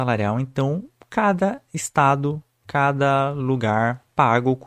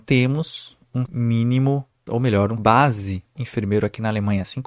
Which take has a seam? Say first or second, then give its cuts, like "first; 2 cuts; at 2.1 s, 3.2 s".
second; 4 cuts; at 1.1 s, 2.1 s, 2.6 s, 3.4 s